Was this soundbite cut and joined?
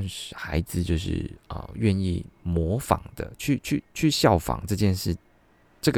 yes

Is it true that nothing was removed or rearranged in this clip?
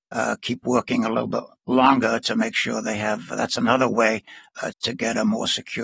no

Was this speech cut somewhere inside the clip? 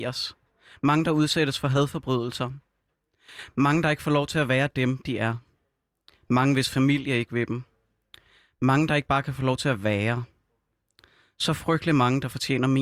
no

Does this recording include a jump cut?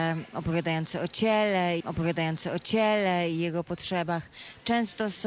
yes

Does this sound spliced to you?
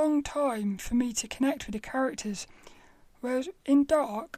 no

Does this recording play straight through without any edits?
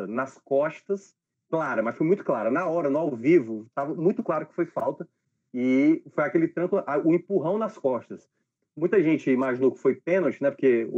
yes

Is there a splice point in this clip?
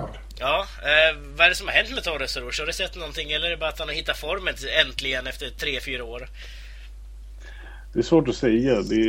no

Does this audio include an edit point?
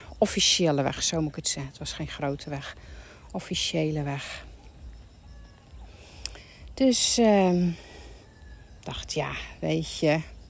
no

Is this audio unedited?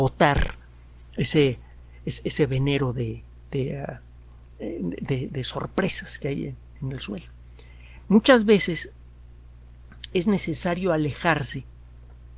yes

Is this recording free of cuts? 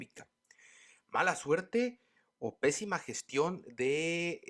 yes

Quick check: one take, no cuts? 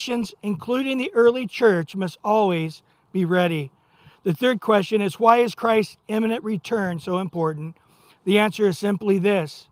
yes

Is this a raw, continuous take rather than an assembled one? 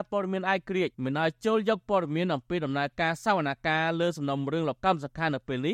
no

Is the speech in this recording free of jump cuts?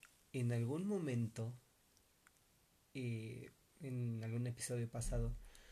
yes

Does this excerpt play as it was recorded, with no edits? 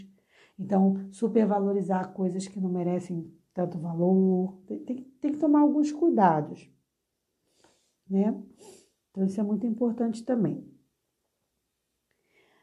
yes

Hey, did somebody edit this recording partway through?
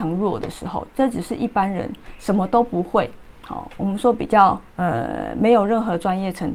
yes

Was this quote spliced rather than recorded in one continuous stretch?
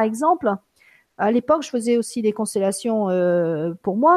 no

